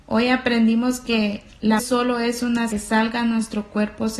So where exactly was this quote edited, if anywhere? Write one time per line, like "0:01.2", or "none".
0:01.8
0:02.7